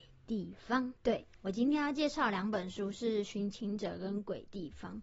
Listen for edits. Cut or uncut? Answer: cut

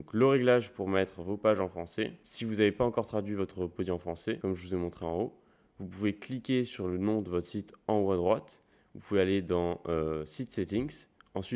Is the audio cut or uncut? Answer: uncut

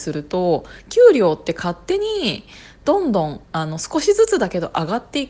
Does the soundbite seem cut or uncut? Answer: cut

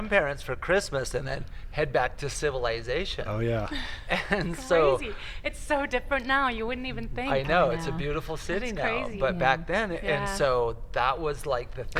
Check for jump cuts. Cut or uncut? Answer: uncut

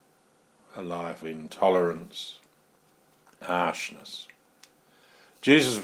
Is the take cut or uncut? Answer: cut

